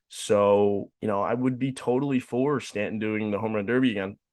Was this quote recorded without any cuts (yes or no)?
no